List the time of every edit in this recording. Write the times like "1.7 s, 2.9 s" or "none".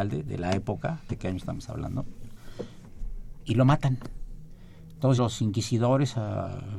1.1 s, 5.2 s